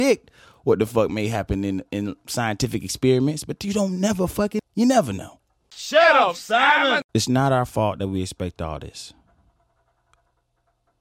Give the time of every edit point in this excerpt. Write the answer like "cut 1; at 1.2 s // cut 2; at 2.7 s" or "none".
cut 1; at 4.6 s // cut 2; at 7.1 s